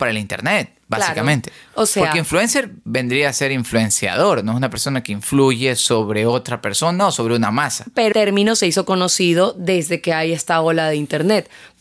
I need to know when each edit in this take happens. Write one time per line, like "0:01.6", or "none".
0:08.1